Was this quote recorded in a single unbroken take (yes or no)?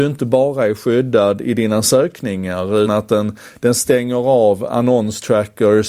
no